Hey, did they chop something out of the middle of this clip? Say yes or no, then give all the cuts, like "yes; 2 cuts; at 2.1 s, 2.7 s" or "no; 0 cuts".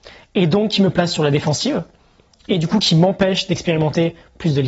no; 0 cuts